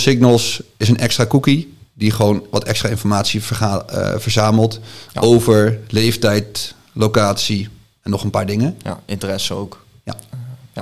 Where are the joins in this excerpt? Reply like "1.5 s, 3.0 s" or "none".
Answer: none